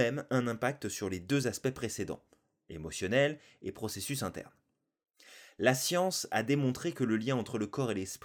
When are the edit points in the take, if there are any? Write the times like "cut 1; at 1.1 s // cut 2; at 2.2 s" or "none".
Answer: none